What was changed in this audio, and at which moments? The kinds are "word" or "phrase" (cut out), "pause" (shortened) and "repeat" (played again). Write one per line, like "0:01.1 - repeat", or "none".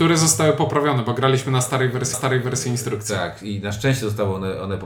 0:02.1 - repeat

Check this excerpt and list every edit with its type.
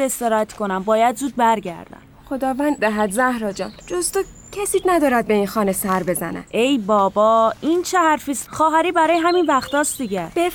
0:02.8 - word
0:03.8 - pause
0:04.8 - word
0:08.5 - phrase

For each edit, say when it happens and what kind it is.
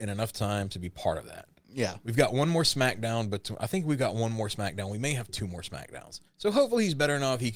0:06.3 - pause

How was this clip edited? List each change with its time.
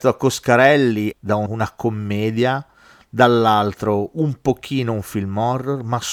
0:01.1 - phrase
0:01.5 - word

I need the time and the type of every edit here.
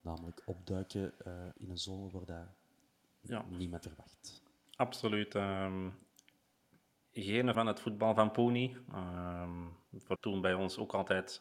0:01.5 - word
0:03.8 - word
0:07.5 - word
0:10.2 - word

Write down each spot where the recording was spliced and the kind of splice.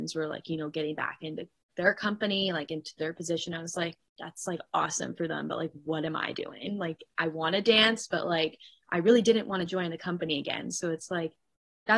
0:01.7 - word

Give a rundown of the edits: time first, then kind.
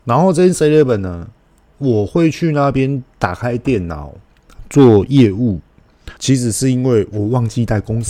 0:03.1 - pause
0:06.2 - pause

